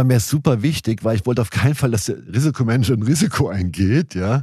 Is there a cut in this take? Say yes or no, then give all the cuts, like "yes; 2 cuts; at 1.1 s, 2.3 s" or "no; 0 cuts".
no; 0 cuts